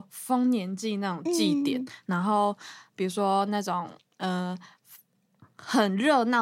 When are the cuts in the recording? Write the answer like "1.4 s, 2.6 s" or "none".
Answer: none